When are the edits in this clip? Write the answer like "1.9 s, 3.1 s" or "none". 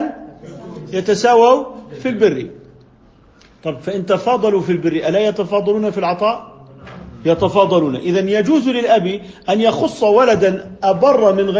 none